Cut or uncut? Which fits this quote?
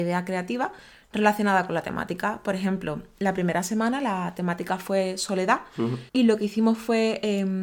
cut